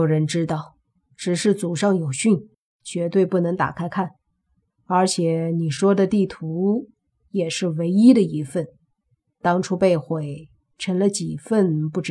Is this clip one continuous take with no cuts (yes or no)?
yes